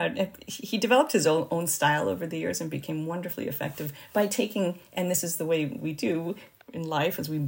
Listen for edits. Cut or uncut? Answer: uncut